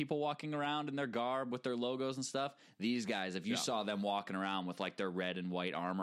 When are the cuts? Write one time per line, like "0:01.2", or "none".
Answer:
none